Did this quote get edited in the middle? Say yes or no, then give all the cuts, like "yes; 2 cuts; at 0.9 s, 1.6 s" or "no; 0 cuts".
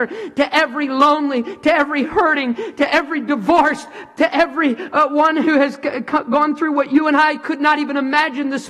no; 0 cuts